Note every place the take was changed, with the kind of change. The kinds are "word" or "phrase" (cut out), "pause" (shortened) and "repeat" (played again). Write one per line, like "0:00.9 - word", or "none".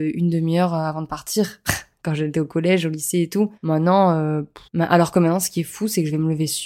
0:03.6 - pause
0:04.7 - pause